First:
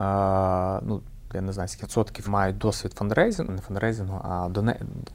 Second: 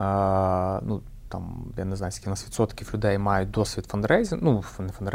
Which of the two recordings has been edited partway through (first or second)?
first